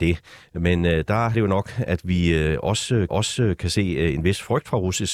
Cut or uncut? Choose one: cut